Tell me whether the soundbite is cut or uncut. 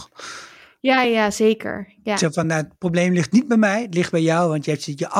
uncut